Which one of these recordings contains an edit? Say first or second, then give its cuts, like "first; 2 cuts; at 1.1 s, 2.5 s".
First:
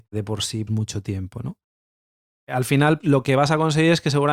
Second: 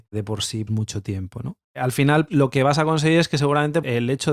second; 1 cut; at 1.6 s